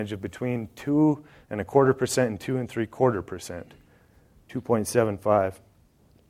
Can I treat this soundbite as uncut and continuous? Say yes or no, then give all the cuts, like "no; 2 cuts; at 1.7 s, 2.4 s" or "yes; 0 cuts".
yes; 0 cuts